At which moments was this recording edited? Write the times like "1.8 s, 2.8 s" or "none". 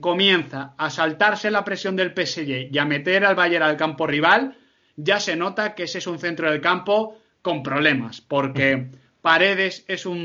none